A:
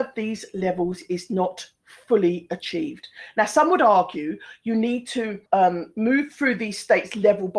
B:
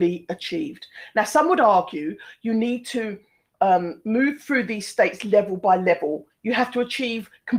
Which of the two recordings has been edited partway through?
A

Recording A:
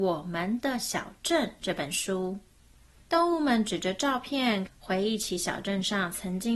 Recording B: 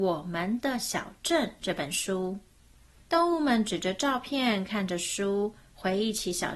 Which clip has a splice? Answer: A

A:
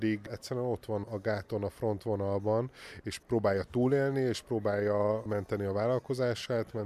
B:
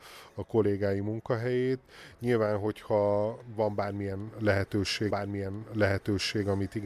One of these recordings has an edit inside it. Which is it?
B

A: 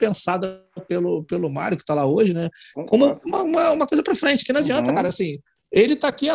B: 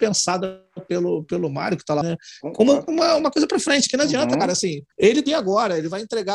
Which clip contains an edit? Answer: B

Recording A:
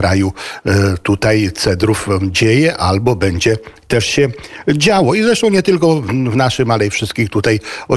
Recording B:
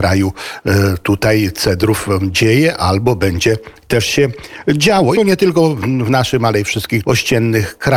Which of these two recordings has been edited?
B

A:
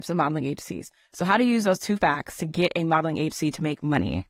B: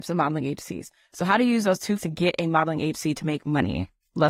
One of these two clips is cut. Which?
B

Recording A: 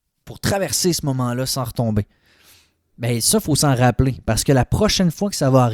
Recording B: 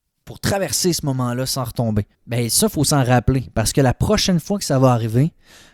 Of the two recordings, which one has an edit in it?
B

